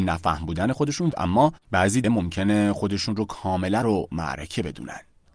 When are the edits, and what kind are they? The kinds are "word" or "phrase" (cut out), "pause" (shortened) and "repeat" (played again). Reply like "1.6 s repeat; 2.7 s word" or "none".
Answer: 1.1 s phrase; 2.0 s word; 3.8 s word